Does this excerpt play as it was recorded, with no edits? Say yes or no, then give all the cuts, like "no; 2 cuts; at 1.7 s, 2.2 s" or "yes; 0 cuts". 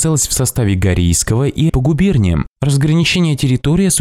no; 1 cut; at 1.7 s